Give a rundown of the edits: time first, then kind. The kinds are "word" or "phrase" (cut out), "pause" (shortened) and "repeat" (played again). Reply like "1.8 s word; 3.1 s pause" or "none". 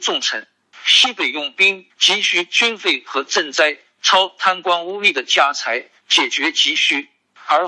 1.9 s phrase